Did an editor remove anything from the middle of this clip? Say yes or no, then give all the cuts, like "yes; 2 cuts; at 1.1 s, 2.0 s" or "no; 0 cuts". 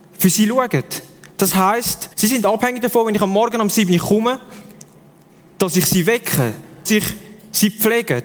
yes; 2 cuts; at 2.1 s, 6.9 s